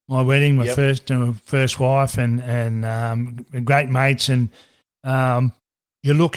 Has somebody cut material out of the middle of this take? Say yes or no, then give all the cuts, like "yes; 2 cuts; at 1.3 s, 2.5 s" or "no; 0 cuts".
no; 0 cuts